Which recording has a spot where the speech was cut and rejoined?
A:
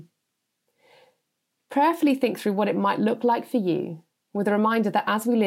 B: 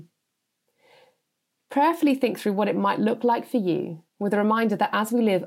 B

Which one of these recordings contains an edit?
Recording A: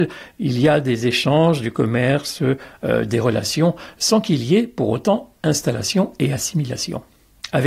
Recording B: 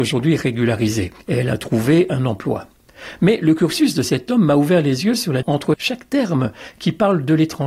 B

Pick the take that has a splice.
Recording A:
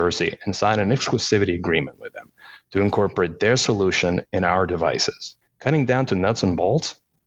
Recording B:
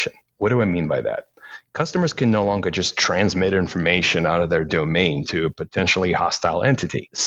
A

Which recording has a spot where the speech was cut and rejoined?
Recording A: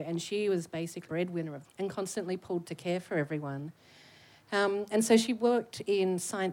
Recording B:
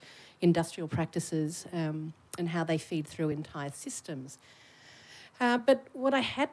A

